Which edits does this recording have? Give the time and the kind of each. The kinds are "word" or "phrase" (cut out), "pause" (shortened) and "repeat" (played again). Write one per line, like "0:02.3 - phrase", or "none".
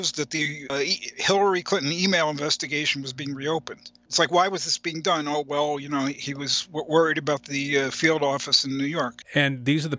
none

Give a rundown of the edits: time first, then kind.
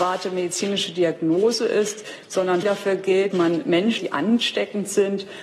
0:02.6 - phrase
0:03.3 - word
0:04.0 - word

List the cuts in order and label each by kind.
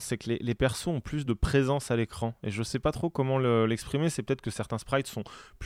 none

